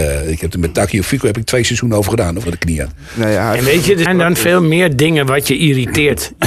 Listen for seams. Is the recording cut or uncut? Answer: cut